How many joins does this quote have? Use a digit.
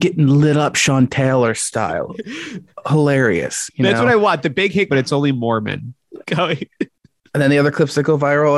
2